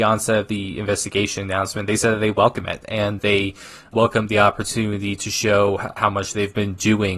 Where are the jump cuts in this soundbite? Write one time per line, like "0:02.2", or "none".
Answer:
0:03.2